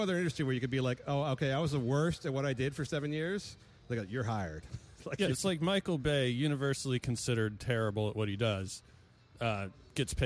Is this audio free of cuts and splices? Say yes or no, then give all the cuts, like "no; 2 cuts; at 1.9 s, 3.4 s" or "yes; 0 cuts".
yes; 0 cuts